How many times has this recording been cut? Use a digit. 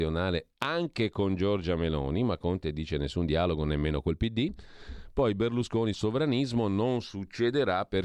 1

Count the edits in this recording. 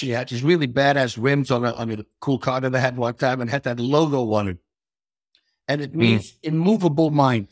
0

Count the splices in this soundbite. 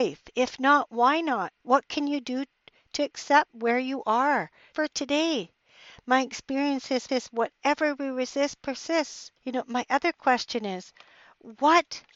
4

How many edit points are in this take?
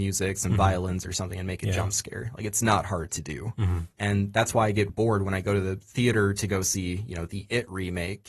2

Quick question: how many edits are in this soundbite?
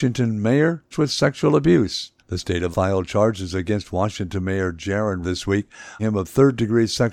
5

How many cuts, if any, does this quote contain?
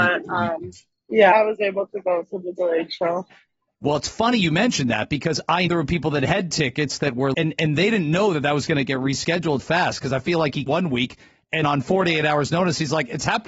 6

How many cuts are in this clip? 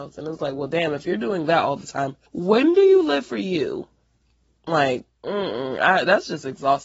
2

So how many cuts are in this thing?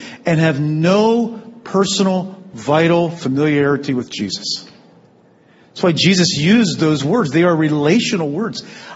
0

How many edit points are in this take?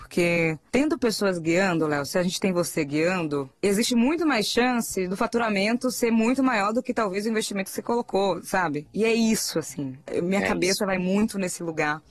0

